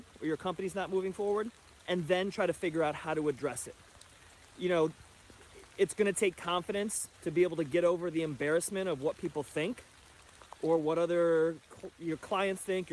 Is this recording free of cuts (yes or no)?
no